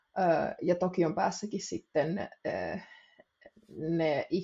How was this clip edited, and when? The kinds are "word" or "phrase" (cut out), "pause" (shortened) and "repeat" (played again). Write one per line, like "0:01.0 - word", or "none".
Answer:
none